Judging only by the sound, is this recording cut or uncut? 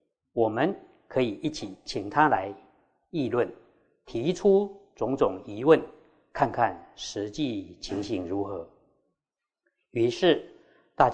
uncut